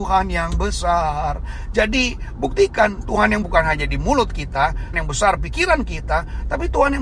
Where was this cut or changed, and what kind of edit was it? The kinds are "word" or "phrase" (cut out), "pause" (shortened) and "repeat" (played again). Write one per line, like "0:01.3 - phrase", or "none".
0:03.4 - word
0:04.9 - word
0:05.4 - phrase